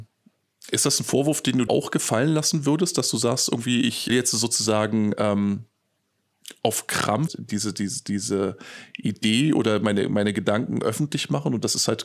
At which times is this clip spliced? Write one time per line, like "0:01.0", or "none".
0:01.7
0:04.1
0:07.3